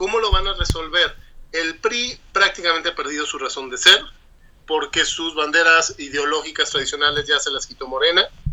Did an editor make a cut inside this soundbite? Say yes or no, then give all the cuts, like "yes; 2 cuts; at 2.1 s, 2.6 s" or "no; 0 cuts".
no; 0 cuts